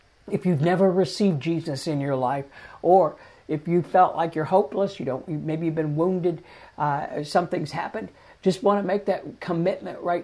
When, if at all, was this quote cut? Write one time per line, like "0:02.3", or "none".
none

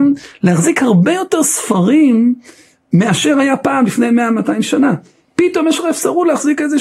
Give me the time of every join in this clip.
none

